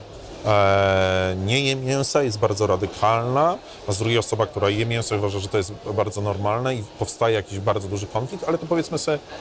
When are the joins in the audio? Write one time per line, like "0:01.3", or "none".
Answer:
none